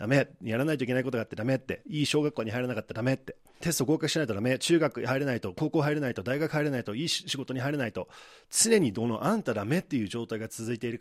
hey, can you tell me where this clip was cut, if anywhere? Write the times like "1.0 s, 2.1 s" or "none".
3.6 s